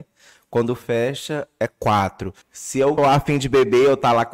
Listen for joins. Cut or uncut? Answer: cut